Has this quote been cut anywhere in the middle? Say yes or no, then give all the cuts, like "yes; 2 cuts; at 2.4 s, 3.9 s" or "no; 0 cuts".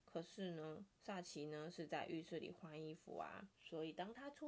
yes; 1 cut; at 3.5 s